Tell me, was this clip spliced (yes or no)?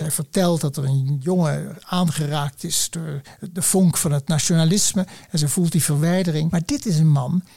no